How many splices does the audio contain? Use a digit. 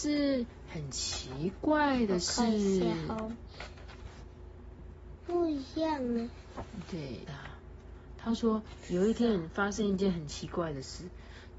2